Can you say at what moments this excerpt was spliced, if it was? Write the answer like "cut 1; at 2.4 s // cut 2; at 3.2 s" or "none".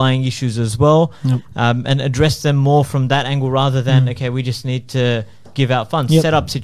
none